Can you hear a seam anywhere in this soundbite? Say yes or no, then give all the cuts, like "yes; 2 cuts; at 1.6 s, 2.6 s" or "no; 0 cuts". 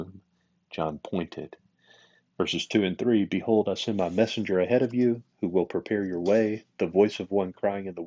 no; 0 cuts